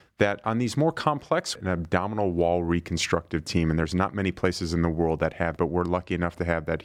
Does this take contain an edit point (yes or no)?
yes